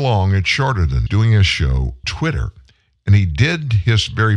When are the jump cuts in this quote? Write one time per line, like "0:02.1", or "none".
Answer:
0:01.1
0:02.0